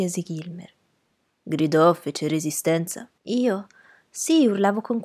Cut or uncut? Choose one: cut